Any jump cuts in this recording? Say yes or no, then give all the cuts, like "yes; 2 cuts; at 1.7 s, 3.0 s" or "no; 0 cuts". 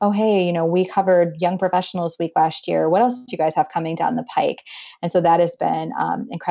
no; 0 cuts